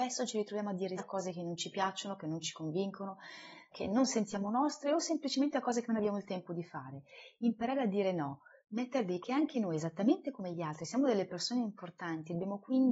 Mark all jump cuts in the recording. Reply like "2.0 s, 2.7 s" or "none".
1.0 s, 3.7 s, 8.6 s, 9.2 s